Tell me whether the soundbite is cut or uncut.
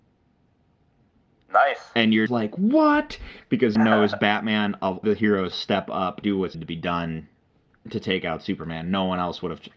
cut